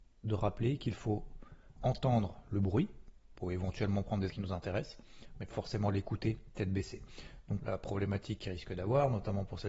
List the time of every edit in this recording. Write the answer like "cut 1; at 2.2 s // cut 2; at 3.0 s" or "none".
cut 1; at 1.8 s // cut 2; at 4.3 s // cut 3; at 5.5 s // cut 4; at 7.6 s